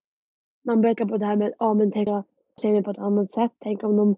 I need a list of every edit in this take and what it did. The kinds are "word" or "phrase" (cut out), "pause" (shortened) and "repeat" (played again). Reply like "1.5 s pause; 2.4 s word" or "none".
1.0 s word; 2.1 s word; 2.6 s word